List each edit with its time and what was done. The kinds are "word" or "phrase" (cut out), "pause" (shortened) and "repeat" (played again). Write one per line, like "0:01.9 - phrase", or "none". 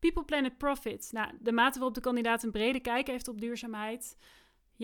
none